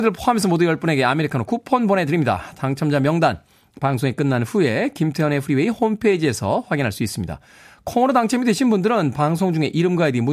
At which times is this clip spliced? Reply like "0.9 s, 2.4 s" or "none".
none